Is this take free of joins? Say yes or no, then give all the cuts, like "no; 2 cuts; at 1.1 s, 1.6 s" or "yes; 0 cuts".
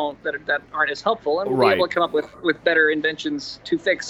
yes; 0 cuts